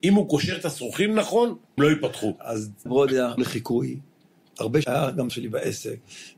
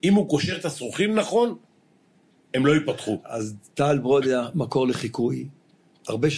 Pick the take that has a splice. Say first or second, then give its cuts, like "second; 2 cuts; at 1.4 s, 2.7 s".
first; 5 cuts; at 1.8 s, 2.9 s, 3.4 s, 4.8 s, 5.3 s